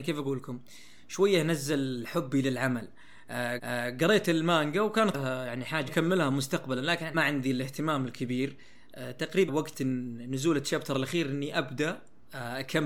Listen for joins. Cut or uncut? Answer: cut